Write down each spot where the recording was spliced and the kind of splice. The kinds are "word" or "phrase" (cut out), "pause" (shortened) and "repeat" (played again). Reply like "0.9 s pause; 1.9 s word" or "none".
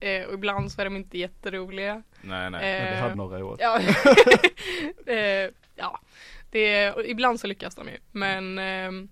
3.1 s word; 6.9 s word; 8.0 s pause

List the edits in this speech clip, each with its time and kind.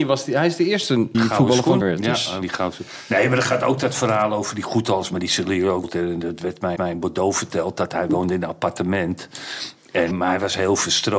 1.1 s phrase; 1.8 s word; 2.4 s word; 5.8 s word; 6.8 s repeat; 10.1 s word

